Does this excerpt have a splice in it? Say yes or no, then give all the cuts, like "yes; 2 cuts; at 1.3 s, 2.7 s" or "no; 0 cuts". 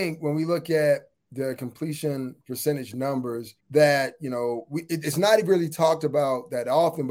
yes; 1 cut; at 3.6 s